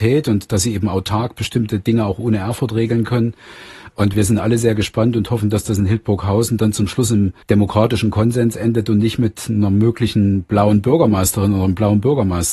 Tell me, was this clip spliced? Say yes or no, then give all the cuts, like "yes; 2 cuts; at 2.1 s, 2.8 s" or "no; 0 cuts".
yes; 1 cut; at 7.4 s